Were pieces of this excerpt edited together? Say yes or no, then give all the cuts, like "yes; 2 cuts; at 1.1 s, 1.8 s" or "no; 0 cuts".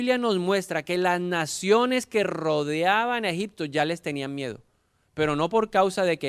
no; 0 cuts